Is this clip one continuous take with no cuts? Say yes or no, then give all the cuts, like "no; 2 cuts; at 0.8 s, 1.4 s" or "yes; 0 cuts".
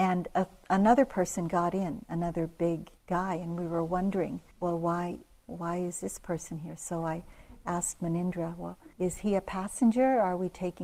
no; 3 cuts; at 3.0 s, 4.5 s, 8.9 s